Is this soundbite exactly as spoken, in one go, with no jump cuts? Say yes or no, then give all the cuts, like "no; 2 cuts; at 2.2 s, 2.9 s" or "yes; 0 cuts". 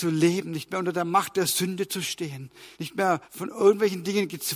no; 2 cuts; at 2.7 s, 3.2 s